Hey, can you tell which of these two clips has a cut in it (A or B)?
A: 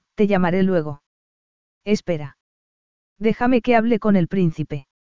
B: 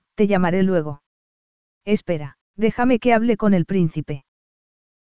B